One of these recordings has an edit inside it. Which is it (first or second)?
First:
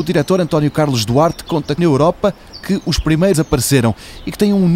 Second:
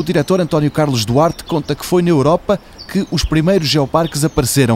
first